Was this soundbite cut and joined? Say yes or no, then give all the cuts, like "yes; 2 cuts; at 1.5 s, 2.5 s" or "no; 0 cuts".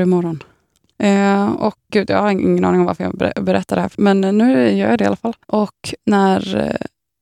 yes; 3 cuts; at 1.9 s, 3.9 s, 5.4 s